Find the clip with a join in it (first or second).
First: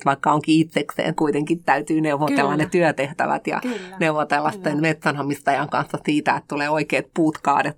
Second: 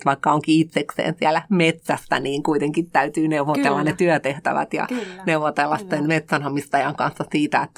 first